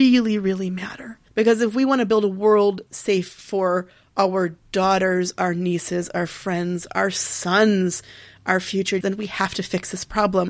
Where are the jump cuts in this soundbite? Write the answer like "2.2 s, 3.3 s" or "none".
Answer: 1.3 s, 2.9 s, 9.0 s